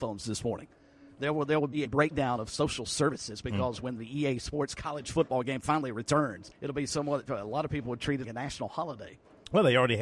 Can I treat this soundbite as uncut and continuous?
no; 3 cuts; at 1.8 s, 6.5 s, 8.2 s

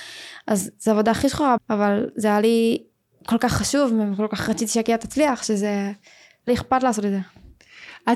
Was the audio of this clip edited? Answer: yes; 2 cuts; at 1.6 s, 6.5 s

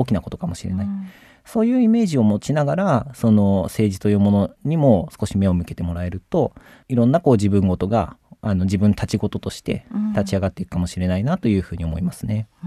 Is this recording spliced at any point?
no; 0 cuts

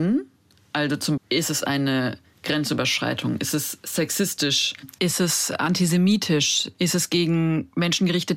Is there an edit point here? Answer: yes; 1 cut; at 1.2 s

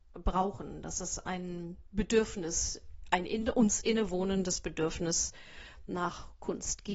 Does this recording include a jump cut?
no; 0 cuts

